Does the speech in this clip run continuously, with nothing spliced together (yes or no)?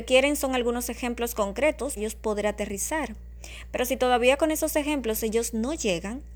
no